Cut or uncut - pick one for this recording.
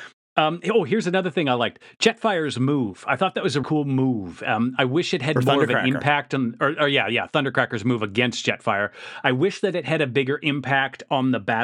cut